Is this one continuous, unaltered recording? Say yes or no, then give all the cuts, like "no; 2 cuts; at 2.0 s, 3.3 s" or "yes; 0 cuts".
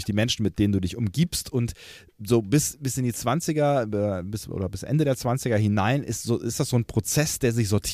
yes; 0 cuts